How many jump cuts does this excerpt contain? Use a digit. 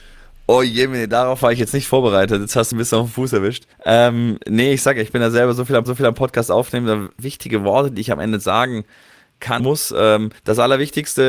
6